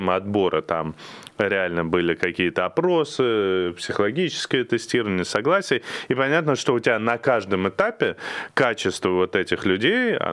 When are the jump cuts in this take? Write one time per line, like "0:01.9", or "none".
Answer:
none

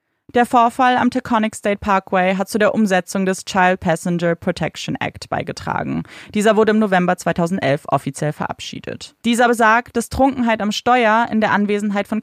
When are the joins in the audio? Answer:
0:09.2

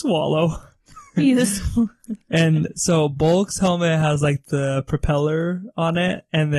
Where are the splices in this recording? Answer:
none

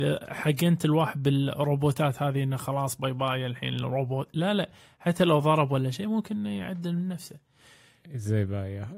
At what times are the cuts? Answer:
none

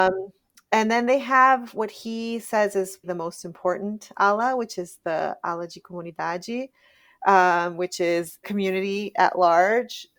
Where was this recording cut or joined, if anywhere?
0:03.0
0:08.4

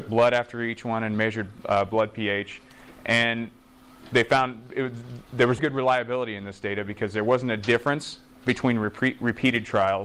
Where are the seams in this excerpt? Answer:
0:05.6

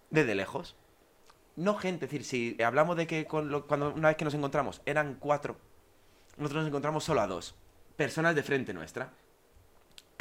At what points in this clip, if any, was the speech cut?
0:02.6
0:07.7

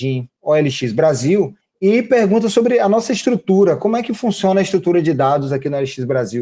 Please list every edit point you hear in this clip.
0:01.6

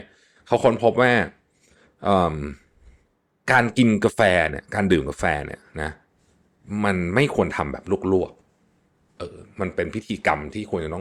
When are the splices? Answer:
none

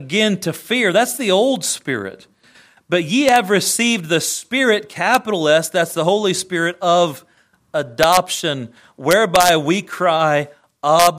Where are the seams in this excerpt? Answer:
none

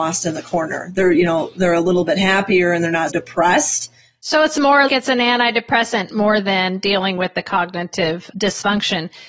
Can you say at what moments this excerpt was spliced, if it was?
0:03.1
0:04.9

